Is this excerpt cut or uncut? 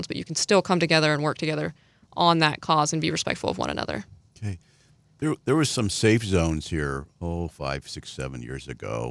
uncut